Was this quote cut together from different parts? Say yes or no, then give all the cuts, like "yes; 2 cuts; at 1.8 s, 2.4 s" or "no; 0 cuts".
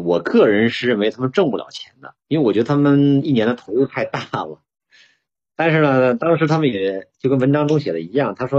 yes; 1 cut; at 2.2 s